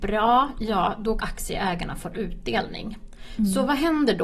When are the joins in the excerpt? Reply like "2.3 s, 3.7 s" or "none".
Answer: 1.2 s